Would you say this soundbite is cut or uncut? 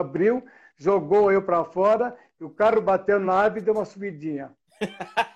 uncut